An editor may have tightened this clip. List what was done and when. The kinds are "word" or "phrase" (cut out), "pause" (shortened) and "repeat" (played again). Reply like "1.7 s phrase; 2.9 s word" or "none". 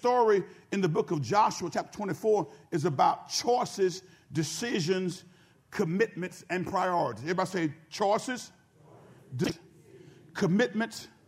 none